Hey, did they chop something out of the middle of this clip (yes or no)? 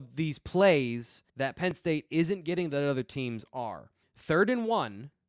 yes